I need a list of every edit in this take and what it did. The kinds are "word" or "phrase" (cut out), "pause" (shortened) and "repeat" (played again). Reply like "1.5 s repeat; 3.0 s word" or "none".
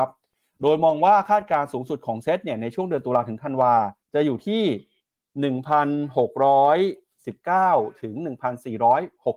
4.0 s pause